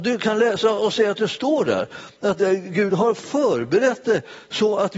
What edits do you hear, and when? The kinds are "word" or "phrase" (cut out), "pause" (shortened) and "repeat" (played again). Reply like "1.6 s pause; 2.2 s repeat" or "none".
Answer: none